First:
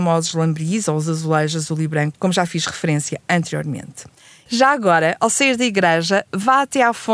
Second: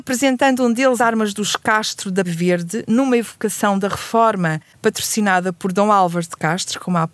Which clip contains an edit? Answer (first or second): second